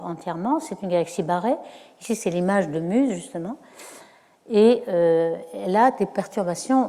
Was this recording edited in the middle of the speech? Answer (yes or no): no